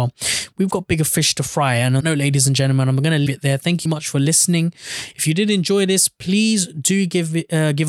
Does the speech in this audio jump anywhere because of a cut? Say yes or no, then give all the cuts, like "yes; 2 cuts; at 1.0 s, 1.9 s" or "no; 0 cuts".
yes; 3 cuts; at 2.0 s, 3.3 s, 3.9 s